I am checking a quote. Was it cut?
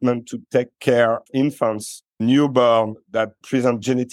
yes; 2 cuts; at 1.3 s, 2.1 s

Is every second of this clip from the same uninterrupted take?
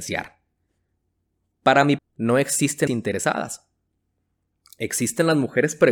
no; 2 cuts; at 2.0 s, 2.9 s

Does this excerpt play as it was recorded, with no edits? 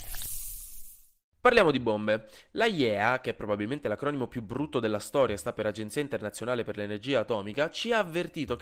yes; 0 cuts

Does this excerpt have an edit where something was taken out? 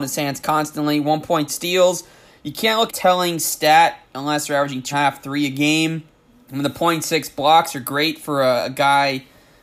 yes; 4 cuts; at 1.5 s, 2.9 s, 4.9 s, 6.2 s

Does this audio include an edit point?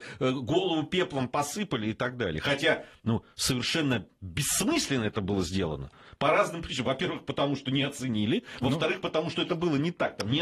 no; 0 cuts

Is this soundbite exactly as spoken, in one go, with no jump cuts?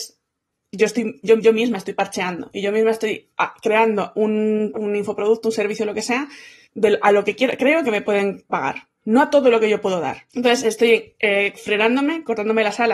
no; 4 cuts; at 1.4 s, 4.7 s, 6.6 s, 10.3 s

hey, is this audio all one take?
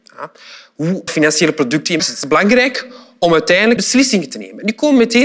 no; 3 cuts; at 1.1 s, 2.0 s, 3.8 s

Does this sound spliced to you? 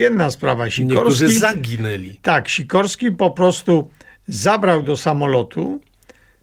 no; 0 cuts

